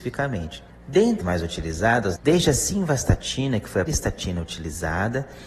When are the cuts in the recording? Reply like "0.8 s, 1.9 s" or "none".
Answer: 1.2 s, 2.2 s, 3.9 s